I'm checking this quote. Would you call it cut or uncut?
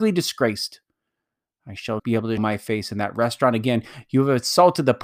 cut